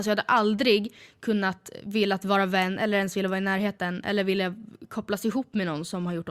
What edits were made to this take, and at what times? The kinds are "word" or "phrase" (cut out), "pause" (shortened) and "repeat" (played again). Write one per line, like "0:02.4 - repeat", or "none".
none